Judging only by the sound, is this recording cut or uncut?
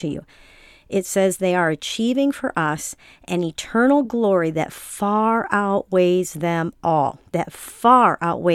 uncut